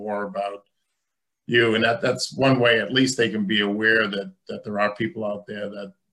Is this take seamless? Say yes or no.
yes